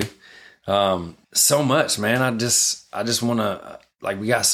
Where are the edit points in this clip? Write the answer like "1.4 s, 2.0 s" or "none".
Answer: 1.2 s